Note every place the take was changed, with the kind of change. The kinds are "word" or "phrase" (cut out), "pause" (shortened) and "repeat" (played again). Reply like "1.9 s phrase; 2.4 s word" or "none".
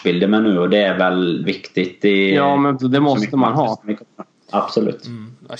1.4 s phrase; 2.8 s word